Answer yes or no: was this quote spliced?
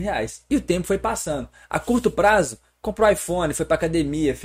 no